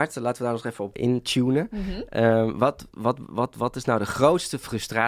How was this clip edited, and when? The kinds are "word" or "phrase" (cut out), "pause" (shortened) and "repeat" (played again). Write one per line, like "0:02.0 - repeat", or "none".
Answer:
0:00.9 - phrase